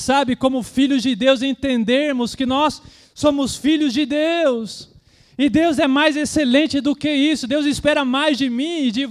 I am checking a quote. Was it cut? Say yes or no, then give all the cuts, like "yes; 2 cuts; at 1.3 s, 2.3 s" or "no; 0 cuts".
no; 0 cuts